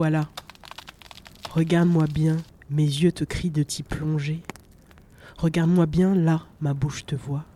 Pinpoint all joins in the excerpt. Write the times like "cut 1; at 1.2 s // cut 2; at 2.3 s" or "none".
cut 1; at 2.5 s // cut 2; at 6.5 s